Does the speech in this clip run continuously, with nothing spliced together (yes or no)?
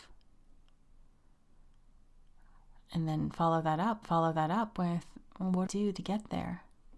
no